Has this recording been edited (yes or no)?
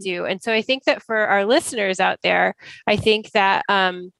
no